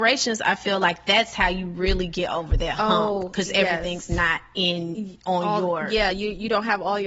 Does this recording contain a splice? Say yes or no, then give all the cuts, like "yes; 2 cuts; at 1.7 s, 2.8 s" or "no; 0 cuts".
no; 0 cuts